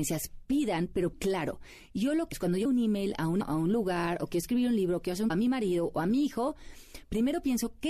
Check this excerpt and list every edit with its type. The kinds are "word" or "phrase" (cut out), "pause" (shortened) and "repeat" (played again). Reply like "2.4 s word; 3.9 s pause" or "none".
1.1 s word; 2.3 s word; 2.6 s word; 3.4 s word; 5.3 s phrase